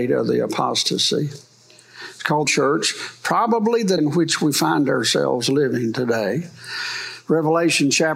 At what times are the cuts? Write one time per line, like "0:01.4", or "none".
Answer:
0:02.4
0:04.0

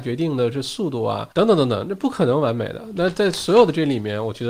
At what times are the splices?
0:01.3

